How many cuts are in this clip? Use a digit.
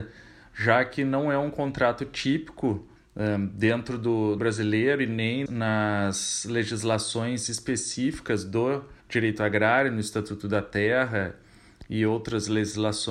4